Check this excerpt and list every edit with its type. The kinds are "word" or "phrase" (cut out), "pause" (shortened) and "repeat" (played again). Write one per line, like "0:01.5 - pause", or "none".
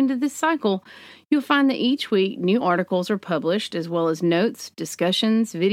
none